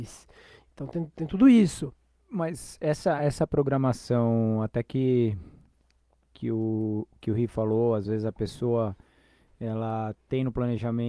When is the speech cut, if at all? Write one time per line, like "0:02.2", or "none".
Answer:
none